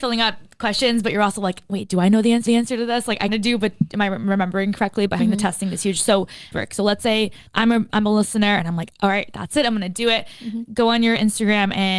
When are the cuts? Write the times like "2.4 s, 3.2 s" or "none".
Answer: 2.5 s, 3.3 s, 5.2 s, 6.5 s, 7.5 s